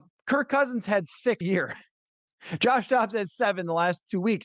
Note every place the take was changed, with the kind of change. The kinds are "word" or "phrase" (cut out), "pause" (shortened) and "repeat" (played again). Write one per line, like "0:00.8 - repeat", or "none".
0:01.4 - word